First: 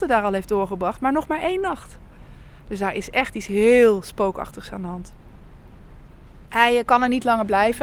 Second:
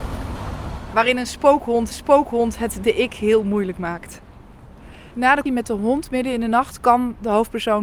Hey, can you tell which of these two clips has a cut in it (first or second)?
second